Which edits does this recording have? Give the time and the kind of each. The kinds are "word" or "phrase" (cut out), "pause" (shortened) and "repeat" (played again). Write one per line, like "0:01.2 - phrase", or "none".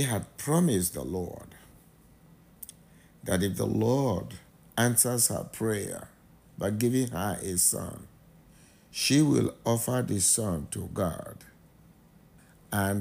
0:04.5 - pause